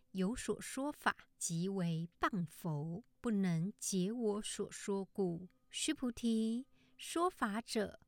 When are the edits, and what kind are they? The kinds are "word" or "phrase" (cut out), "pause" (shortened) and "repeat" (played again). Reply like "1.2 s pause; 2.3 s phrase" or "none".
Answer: 1.3 s pause; 3.1 s pause; 5.6 s pause